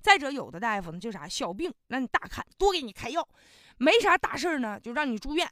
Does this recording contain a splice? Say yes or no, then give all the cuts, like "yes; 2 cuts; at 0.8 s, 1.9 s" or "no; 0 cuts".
no; 0 cuts